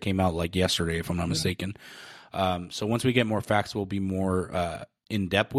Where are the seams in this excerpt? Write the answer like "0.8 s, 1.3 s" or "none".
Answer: none

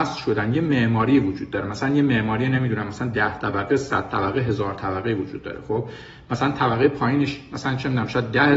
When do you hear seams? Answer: none

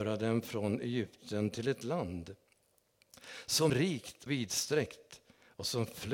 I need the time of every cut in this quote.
3.7 s, 4.3 s

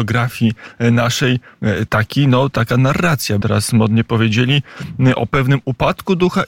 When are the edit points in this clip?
1.9 s, 3.4 s

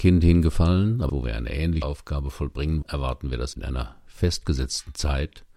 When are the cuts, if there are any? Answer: 1.1 s, 1.8 s, 2.8 s, 3.5 s

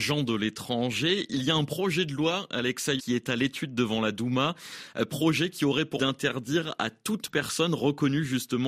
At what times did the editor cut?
3.0 s, 6.0 s

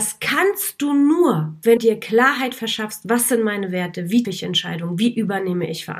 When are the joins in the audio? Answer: 1.8 s, 4.2 s

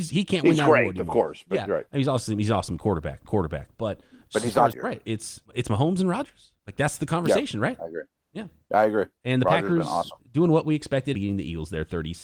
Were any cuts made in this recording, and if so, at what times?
3.2 s, 4.7 s, 5.4 s, 6.6 s, 9.2 s, 11.1 s

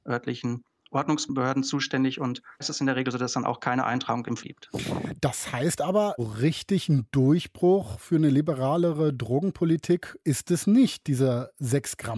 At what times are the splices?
2.6 s, 4.4 s, 6.2 s, 10.2 s

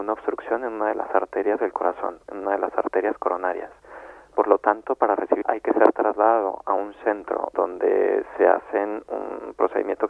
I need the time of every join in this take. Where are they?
5.4 s, 7.5 s, 9.1 s

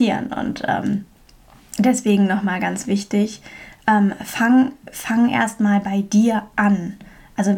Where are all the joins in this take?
none

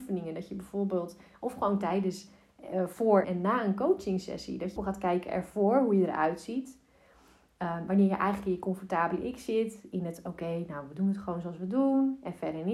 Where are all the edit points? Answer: 3.2 s, 4.8 s

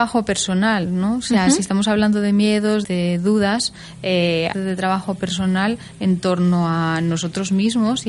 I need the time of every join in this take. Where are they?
2.8 s, 4.5 s

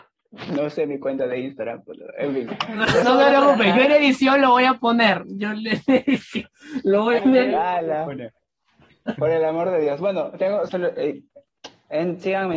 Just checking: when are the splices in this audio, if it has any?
3.0 s, 7.2 s, 10.7 s

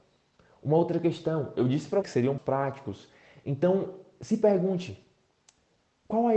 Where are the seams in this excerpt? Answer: 2.0 s, 2.4 s

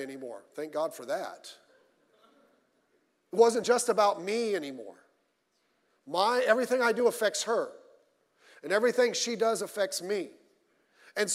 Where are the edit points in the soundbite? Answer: none

